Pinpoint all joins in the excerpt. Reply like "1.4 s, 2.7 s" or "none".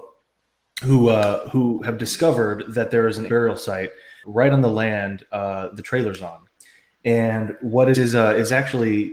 3.3 s, 4.2 s, 7.9 s